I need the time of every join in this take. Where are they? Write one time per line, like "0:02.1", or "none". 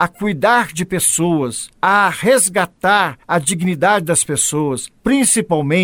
0:01.7
0:03.2
0:04.9